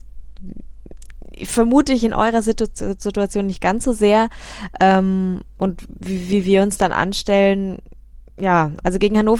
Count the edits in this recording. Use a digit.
1